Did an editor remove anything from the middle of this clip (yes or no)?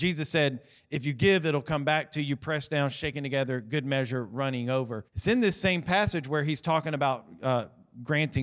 yes